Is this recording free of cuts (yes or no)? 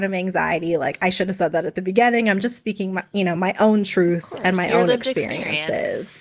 yes